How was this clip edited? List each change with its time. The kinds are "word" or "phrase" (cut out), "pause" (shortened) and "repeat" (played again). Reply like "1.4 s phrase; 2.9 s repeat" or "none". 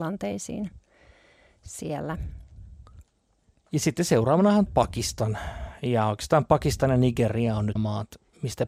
4.7 s word; 7.8 s word